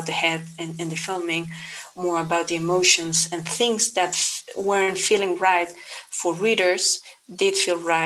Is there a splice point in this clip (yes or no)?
no